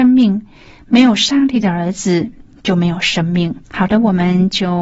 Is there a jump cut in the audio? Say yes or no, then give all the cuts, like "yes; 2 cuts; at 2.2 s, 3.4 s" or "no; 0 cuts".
yes; 1 cut; at 3.6 s